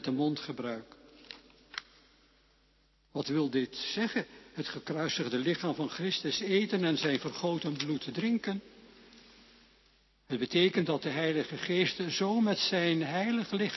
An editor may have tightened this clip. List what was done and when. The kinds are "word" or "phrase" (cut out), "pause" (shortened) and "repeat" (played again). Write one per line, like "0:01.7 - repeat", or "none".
none